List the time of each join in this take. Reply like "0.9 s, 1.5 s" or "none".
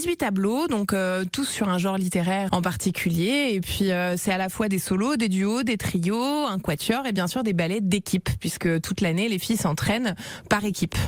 2.5 s